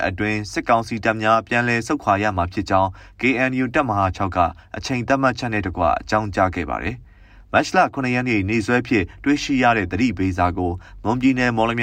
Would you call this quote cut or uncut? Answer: uncut